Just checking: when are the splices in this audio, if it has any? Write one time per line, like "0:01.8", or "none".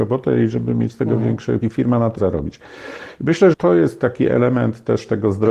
0:01.6
0:02.2
0:03.5

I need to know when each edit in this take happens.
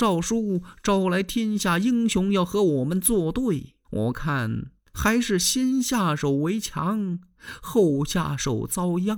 0:03.8
0:04.9

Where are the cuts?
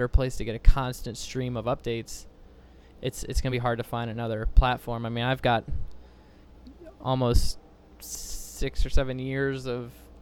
none

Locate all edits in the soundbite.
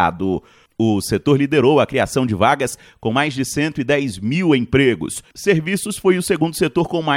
none

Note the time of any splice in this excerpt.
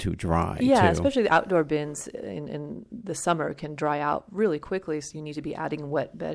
none

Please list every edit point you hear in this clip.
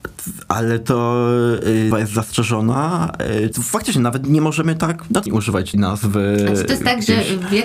0:01.9
0:03.5
0:05.3
0:05.7

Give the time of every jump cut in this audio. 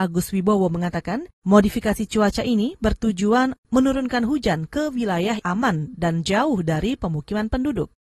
0:05.4

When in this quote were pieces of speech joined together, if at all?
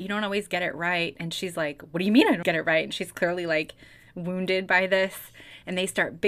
0:02.4

